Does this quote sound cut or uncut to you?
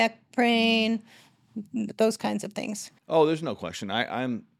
uncut